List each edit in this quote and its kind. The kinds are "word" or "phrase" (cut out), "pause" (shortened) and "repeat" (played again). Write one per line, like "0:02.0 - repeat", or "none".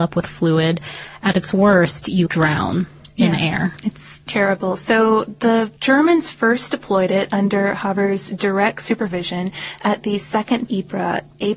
0:02.3 - word
0:04.3 - word
0:05.8 - pause
0:10.7 - phrase